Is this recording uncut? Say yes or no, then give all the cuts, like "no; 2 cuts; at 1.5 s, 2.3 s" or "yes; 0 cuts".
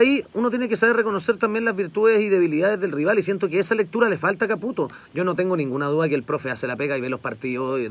yes; 0 cuts